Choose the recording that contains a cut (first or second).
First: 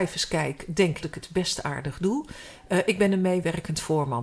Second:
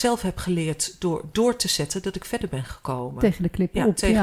first